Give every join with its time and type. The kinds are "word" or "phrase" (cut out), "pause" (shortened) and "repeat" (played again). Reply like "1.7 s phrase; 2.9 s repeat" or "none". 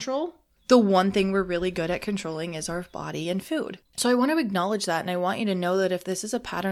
3.9 s pause